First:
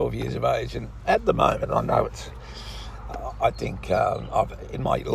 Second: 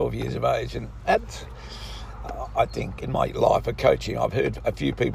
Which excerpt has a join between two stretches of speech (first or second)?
second